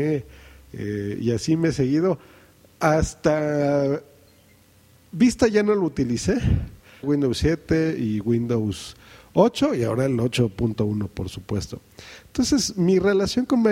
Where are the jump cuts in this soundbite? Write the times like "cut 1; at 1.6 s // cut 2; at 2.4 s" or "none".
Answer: cut 1; at 7.0 s